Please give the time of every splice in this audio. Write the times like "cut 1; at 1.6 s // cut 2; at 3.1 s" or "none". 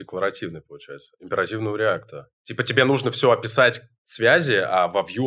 cut 1; at 2.4 s